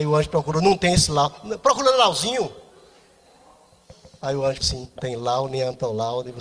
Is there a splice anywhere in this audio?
yes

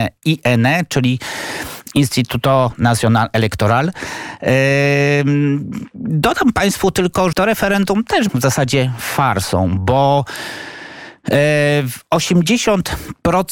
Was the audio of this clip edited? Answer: yes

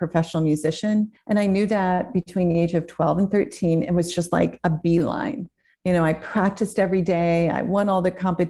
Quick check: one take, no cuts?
yes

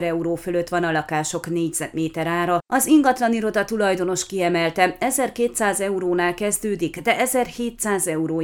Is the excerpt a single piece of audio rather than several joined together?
yes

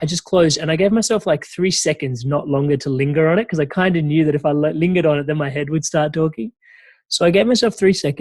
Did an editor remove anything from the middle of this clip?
no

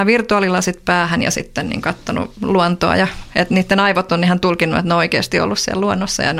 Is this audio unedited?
no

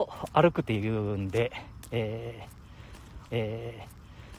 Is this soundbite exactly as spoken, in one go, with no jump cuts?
no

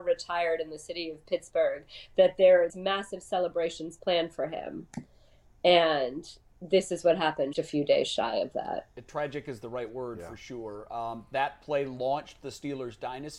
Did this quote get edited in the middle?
yes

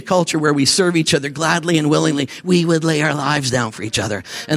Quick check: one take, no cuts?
yes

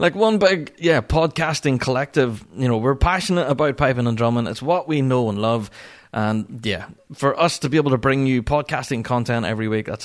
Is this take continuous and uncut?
yes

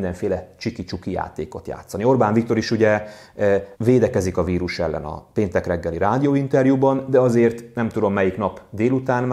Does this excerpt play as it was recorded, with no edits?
no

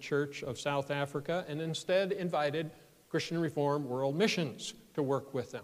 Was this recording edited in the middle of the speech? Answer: no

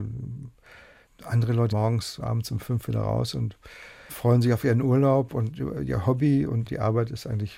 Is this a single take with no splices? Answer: no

